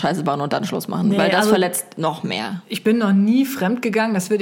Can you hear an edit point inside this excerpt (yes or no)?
no